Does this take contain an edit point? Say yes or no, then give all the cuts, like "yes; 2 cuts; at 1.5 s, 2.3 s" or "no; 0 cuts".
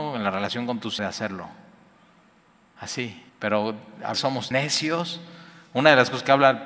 yes; 4 cuts; at 1.0 s, 3.3 s, 4.1 s, 4.5 s